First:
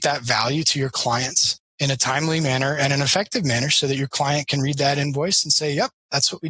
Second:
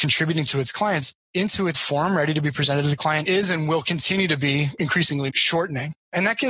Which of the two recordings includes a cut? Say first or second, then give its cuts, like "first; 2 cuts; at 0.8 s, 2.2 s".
second; 1 cut; at 1.7 s